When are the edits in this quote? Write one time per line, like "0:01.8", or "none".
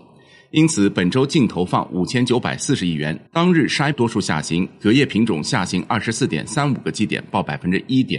0:03.3
0:03.9